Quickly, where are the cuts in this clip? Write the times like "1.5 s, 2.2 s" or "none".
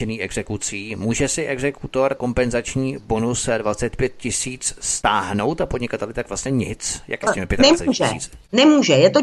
2.2 s, 6.5 s, 7.3 s